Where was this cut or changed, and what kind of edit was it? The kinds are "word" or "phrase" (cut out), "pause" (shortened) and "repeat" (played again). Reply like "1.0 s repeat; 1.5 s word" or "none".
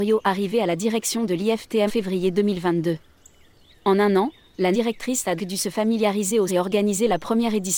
1.9 s word; 4.7 s word; 5.4 s word; 6.5 s word